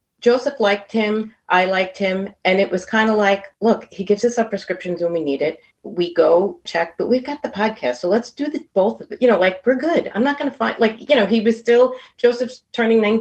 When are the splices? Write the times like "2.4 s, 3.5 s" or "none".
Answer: 5.7 s, 6.7 s